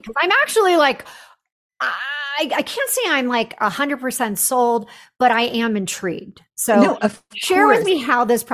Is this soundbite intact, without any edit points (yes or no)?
yes